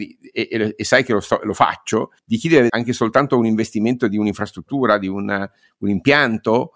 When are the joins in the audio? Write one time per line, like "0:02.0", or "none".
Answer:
0:02.2
0:02.7